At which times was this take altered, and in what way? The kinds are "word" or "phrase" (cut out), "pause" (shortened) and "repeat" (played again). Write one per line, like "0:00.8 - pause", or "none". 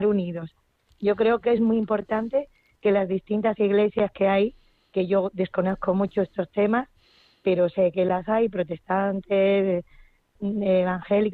none